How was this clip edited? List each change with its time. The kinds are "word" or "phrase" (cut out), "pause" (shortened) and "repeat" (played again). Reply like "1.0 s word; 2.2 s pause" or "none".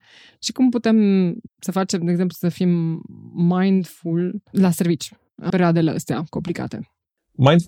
1.5 s pause; 5.5 s phrase